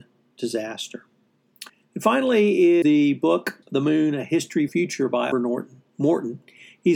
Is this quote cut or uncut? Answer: cut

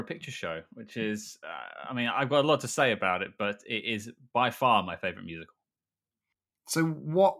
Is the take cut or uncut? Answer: uncut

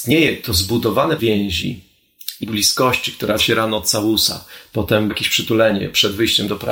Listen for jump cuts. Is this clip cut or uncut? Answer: cut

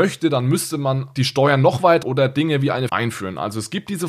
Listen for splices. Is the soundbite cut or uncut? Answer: cut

